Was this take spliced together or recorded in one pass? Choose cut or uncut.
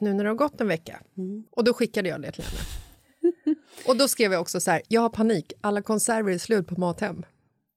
cut